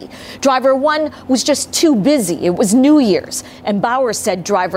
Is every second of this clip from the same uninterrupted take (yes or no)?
yes